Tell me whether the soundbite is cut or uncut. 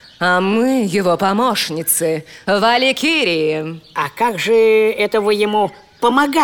uncut